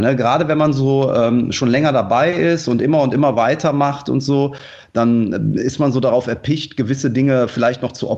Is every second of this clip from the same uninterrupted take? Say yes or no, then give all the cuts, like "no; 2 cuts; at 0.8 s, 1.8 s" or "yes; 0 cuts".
yes; 0 cuts